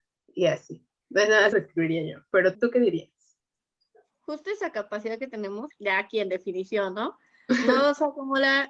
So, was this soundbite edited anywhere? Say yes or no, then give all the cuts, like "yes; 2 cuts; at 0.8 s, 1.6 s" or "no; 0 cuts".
yes; 3 cuts; at 1.5 s, 2.5 s, 5.7 s